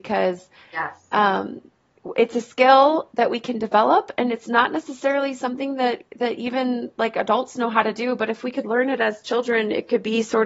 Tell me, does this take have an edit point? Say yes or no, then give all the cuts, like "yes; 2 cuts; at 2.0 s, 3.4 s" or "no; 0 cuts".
yes; 1 cut; at 6.1 s